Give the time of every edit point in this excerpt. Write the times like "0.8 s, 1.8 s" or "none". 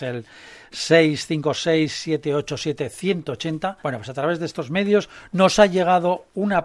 3.8 s